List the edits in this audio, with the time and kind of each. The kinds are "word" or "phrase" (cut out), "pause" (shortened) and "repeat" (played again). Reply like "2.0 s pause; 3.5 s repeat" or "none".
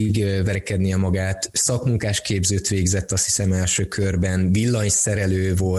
none